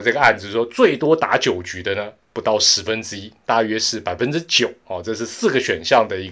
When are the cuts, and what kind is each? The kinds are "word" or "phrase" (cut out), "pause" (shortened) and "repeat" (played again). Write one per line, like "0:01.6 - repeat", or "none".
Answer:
0:02.2 - pause